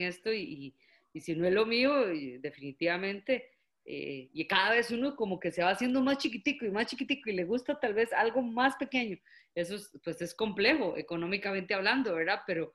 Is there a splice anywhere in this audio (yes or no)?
no